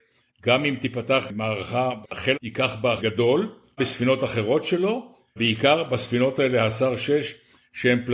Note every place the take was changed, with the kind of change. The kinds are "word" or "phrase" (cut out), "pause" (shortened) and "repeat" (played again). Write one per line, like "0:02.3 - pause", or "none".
0:02.0 - word
0:02.3 - word
0:03.0 - word
0:03.8 - word
0:05.4 - word
0:06.4 - word